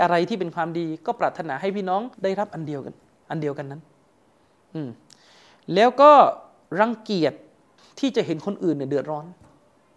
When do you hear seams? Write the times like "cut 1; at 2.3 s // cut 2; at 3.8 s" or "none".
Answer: cut 1; at 2.1 s